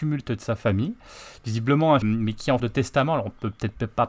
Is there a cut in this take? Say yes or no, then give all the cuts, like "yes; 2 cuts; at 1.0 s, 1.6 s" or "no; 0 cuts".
yes; 2 cuts; at 2.0 s, 2.6 s